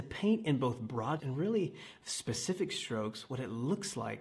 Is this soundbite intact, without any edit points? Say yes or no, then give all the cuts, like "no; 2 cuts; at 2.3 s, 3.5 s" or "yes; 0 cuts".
no; 1 cut; at 1.2 s